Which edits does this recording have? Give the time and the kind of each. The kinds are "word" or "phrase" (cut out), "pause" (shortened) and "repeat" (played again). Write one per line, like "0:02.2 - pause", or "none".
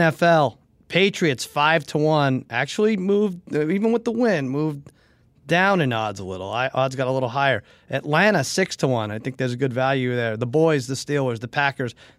none